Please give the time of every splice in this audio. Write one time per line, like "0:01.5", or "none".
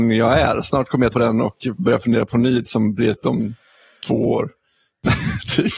0:01.1
0:02.6
0:03.2